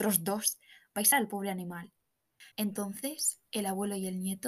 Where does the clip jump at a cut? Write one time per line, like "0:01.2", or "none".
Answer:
0:01.1
0:02.5